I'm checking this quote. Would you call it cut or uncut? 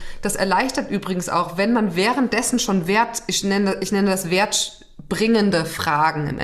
uncut